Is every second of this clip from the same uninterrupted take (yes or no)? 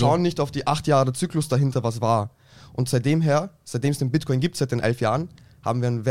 yes